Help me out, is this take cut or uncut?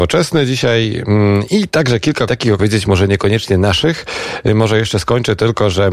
cut